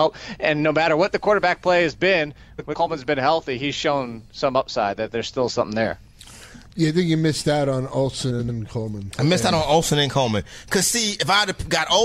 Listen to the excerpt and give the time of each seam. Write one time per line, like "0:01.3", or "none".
none